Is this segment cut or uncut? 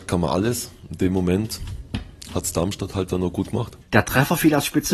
cut